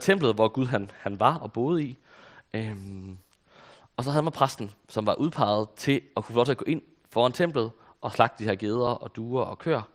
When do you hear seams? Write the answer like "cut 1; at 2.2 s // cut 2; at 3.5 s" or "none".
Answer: none